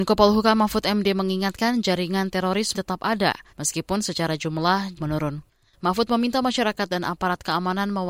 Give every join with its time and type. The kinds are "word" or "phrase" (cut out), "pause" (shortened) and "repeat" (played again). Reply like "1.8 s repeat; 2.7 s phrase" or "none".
2.7 s word; 3.5 s pause; 5.0 s word; 5.5 s pause